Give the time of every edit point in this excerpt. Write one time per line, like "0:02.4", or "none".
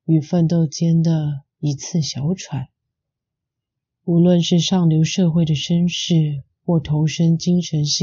none